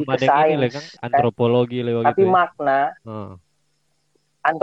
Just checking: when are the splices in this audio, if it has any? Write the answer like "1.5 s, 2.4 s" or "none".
1.0 s, 3.0 s